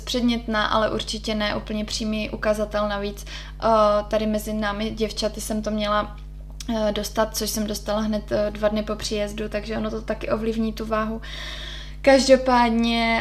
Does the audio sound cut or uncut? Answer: uncut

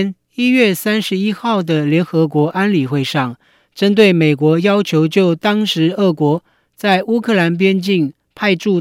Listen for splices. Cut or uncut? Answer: uncut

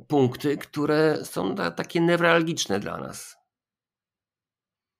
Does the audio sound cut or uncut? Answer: uncut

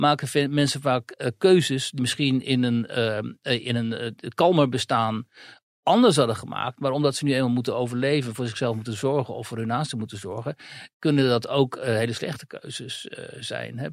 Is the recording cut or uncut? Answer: cut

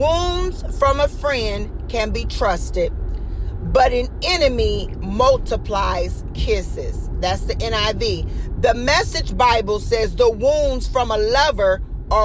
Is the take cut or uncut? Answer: uncut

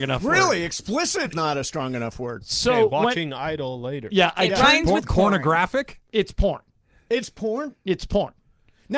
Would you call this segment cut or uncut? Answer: cut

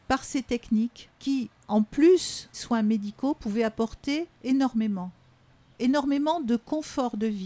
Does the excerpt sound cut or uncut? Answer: cut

